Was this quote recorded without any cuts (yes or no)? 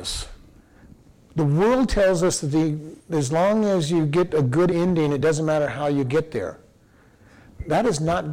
yes